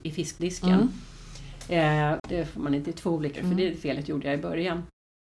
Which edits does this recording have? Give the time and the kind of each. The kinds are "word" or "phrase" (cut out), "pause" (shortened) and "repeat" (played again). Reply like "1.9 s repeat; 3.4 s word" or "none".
2.2 s phrase; 2.8 s word; 3.4 s word